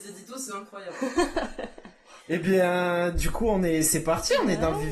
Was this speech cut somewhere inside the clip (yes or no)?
yes